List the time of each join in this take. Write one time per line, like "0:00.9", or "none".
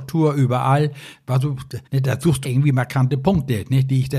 0:01.9
0:02.4